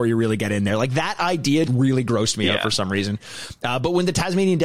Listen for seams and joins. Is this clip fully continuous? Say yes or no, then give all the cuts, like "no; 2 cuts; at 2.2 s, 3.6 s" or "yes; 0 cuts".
no; 1 cut; at 1.7 s